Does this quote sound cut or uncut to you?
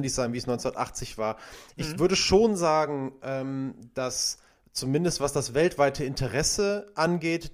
uncut